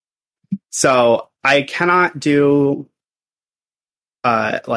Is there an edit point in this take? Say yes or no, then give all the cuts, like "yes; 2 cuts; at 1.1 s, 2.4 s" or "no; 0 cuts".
no; 0 cuts